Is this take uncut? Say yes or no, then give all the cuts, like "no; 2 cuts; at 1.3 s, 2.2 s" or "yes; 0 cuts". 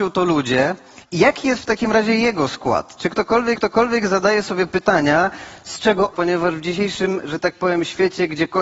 no; 3 cuts; at 1.0 s, 3.6 s, 6.1 s